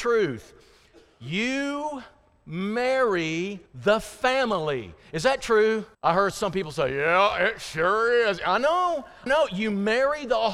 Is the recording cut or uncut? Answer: cut